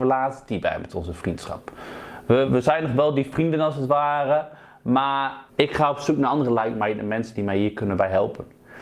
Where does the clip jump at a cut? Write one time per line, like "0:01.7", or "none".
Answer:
0:02.5
0:05.5

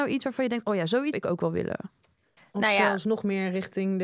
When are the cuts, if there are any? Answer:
0:01.1

